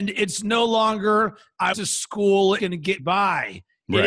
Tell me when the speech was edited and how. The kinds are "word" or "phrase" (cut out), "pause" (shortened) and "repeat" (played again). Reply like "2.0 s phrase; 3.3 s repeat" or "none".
1.7 s word; 2.6 s phrase; 3.0 s word